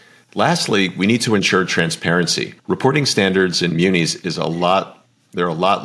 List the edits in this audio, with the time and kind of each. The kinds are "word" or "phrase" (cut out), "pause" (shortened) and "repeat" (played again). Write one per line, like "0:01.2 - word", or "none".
0:02.6 - pause